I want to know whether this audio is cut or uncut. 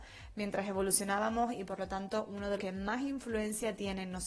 cut